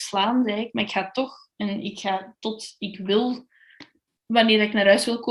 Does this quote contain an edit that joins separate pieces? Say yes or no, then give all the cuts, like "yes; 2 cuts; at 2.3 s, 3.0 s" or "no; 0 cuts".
no; 0 cuts